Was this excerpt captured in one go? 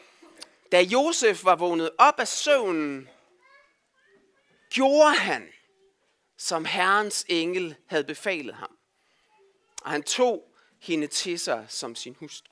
yes; 0 cuts

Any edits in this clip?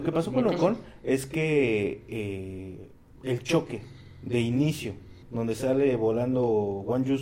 yes; 2 cuts; at 3.2 s, 5.2 s

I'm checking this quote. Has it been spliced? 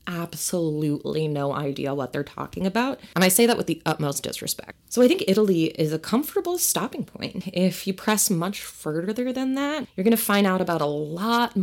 no; 0 cuts

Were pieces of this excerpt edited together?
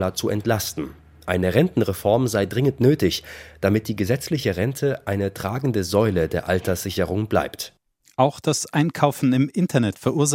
no; 0 cuts

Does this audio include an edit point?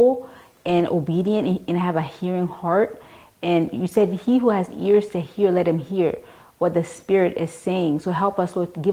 no; 0 cuts

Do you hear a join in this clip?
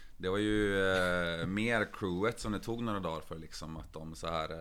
no; 0 cuts

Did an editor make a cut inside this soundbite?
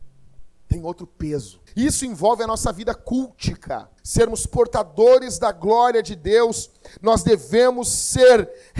yes; 2 cuts; at 1.7 s, 4.0 s

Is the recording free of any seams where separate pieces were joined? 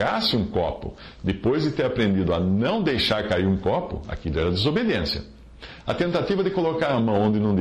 yes; 0 cuts

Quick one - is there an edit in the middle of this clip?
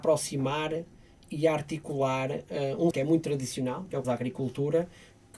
yes; 2 cuts; at 2.9 s, 4.0 s

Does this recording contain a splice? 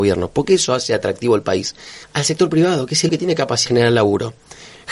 yes; 3 cuts; at 2.0 s, 3.1 s, 3.7 s

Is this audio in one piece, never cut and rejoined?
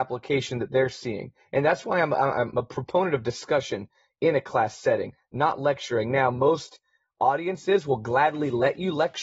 yes; 0 cuts

